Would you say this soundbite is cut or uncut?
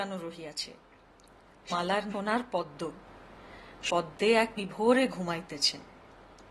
cut